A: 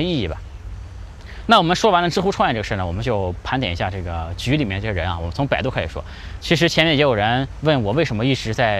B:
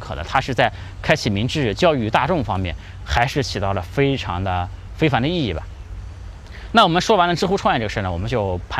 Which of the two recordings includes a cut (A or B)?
A